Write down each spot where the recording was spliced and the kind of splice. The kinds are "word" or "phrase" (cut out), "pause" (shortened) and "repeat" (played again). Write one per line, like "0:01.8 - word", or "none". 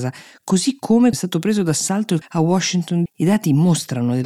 0:01.1 - word
0:02.2 - word
0:03.1 - word